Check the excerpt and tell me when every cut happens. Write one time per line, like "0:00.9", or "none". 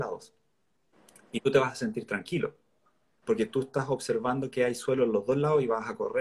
none